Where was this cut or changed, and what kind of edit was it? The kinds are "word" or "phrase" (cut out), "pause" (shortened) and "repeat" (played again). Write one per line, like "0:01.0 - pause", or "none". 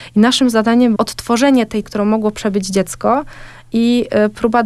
0:01.0 - word
0:01.8 - word